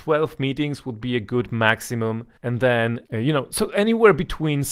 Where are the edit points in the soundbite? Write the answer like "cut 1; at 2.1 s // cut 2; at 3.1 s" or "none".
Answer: cut 1; at 2.4 s // cut 2; at 3.0 s

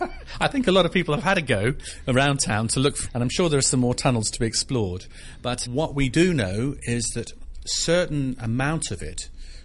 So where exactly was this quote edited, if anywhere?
cut 1; at 3.1 s // cut 2; at 5.7 s

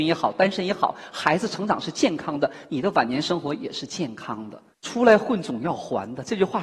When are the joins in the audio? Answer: cut 1; at 4.7 s

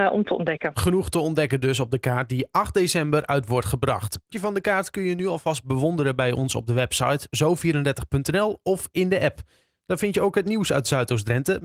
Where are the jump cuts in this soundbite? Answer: cut 1; at 4.3 s

